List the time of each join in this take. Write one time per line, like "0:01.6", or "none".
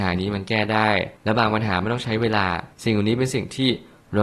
0:01.2
0:02.7